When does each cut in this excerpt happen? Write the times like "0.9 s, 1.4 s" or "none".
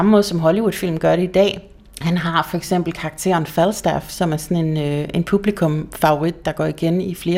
1.9 s